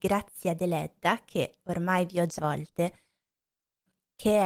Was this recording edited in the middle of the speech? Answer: yes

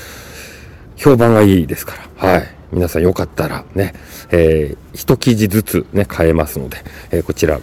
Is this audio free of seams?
no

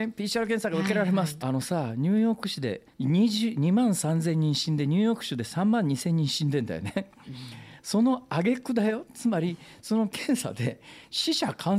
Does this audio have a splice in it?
yes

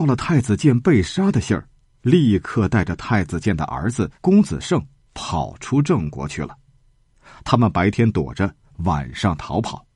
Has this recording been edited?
yes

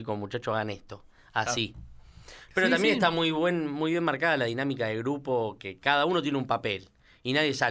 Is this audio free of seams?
yes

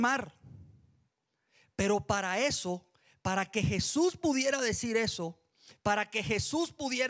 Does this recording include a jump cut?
no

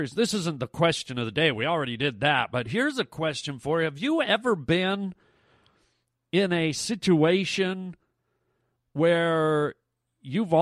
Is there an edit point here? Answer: no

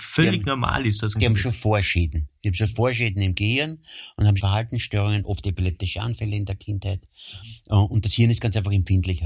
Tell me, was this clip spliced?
yes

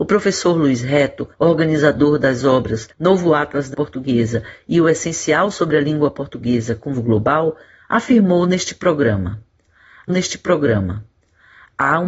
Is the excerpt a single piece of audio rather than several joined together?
no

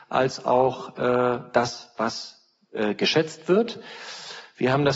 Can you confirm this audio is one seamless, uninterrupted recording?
yes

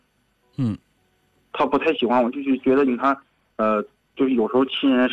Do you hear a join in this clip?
no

